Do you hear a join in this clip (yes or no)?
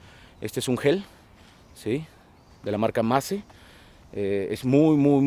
no